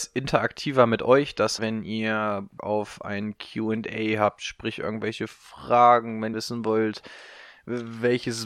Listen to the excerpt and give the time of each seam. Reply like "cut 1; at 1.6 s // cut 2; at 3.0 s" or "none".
cut 1; at 1.6 s // cut 2; at 2.6 s // cut 3; at 6.3 s